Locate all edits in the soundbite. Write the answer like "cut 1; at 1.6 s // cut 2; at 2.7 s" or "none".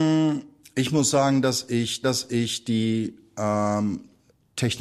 cut 1; at 2.0 s